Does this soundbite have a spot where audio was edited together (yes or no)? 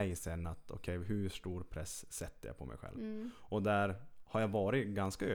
no